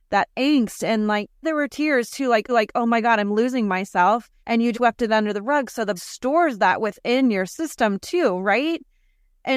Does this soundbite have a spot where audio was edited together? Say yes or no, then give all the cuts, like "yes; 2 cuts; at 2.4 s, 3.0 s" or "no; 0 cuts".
yes; 5 cuts; at 1.4 s, 2.5 s, 4.4 s, 4.7 s, 6.0 s